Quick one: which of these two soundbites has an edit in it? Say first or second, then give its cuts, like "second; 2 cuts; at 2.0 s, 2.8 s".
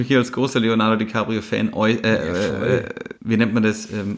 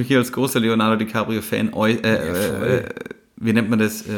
first; 1 cut; at 3.2 s